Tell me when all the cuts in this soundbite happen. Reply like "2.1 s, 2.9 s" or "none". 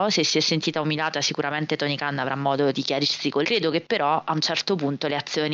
2.7 s, 3.4 s